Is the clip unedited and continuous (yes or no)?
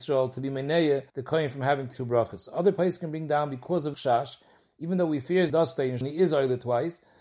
no